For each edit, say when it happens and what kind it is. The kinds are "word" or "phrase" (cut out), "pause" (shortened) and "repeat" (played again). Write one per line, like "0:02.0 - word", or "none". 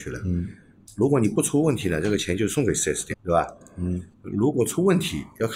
0:03.1 - word
0:04.1 - pause